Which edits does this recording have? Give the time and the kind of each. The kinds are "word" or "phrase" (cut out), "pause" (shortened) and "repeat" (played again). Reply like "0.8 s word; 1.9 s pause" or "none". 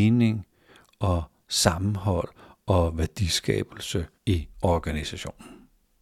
4.1 s pause